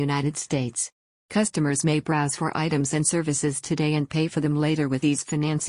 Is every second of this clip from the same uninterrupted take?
yes; 0 cuts

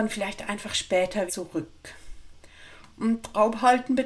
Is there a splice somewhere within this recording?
yes; 1 cut; at 1.3 s

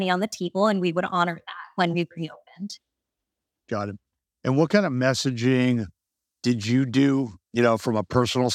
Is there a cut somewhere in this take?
no; 0 cuts

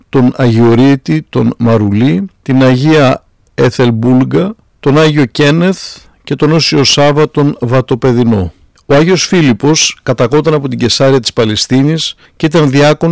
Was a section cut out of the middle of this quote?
no; 0 cuts

